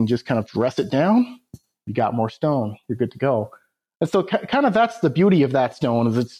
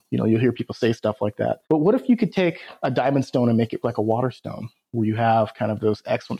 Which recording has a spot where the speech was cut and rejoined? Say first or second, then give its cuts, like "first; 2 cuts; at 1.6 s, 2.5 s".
second; 2 cuts; at 1.6 s, 3.8 s